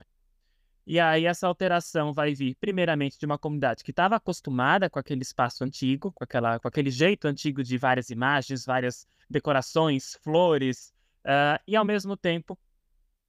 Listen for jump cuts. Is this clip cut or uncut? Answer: uncut